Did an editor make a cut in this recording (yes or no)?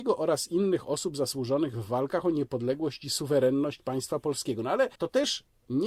yes